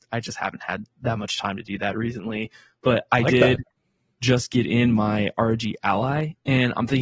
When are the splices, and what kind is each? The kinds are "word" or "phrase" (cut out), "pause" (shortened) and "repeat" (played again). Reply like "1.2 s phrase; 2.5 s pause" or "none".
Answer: none